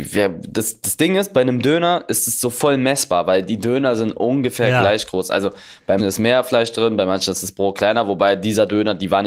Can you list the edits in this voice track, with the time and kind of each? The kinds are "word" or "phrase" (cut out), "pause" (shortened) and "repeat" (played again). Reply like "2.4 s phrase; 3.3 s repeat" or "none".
6.0 s word